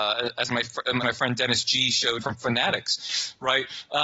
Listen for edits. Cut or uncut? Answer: cut